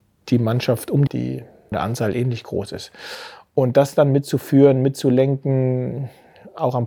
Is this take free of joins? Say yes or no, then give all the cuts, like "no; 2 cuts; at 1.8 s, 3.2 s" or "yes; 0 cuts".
no; 2 cuts; at 1.1 s, 1.7 s